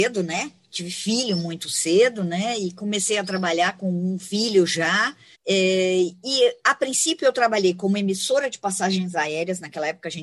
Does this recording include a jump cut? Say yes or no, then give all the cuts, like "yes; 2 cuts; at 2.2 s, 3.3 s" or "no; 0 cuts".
yes; 1 cut; at 5.3 s